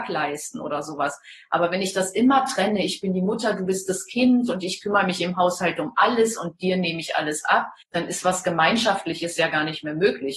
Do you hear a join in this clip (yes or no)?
yes